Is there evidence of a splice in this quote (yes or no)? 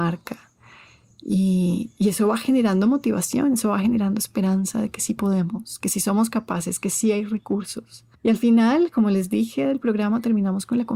yes